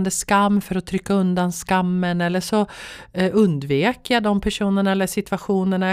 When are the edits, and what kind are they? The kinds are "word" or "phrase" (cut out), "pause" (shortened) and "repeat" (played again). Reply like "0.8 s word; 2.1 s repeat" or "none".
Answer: none